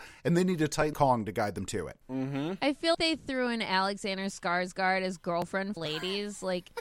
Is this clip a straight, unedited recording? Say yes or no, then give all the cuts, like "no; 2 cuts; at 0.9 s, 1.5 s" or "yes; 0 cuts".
no; 4 cuts; at 0.9 s, 2.0 s, 2.9 s, 5.8 s